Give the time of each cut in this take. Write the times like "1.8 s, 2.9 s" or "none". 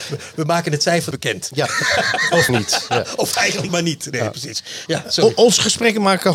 1.1 s, 2.5 s, 3.7 s